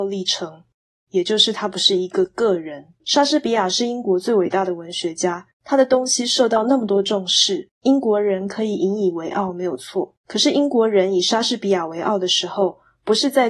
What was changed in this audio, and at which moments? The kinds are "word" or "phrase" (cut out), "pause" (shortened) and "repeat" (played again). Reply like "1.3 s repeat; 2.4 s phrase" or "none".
3.0 s pause; 5.5 s pause; 7.7 s pause; 10.2 s pause